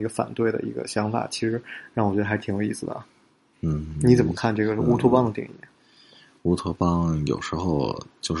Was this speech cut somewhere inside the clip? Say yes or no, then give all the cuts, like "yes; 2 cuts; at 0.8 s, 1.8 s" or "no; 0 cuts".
no; 0 cuts